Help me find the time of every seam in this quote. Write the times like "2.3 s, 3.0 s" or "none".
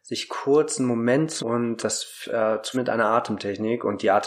1.4 s, 1.8 s, 2.7 s